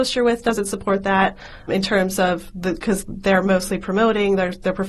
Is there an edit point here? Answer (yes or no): yes